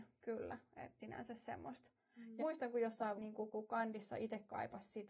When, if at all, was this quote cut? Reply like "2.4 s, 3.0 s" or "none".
1.0 s, 2.4 s, 3.1 s, 3.5 s

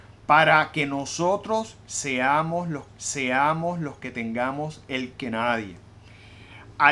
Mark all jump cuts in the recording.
2.9 s, 5.1 s

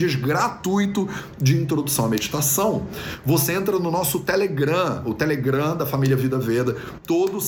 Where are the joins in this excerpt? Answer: none

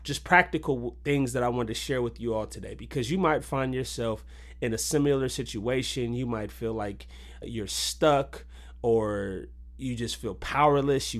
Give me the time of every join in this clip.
7.4 s

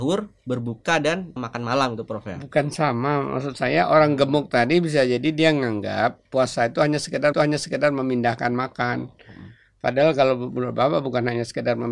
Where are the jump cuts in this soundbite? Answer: 1.4 s, 7.3 s

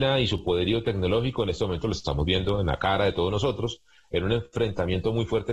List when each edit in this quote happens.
none

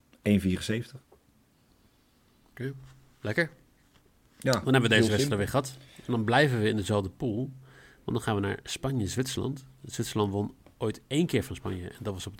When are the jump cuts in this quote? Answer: 5.9 s

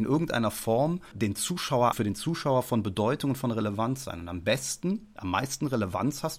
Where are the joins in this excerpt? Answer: 1.1 s, 1.9 s

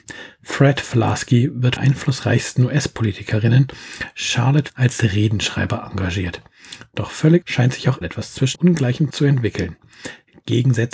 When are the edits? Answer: 1.8 s, 4.7 s, 7.4 s, 8.0 s, 8.5 s, 9.1 s

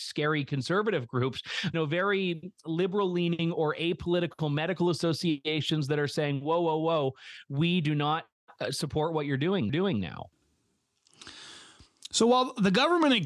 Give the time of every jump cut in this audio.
1.7 s, 9.7 s

